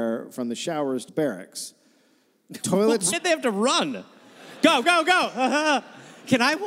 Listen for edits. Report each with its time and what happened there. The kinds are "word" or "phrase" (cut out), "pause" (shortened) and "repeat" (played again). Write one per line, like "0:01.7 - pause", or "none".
0:01.1 - word
0:03.1 - word
0:04.8 - word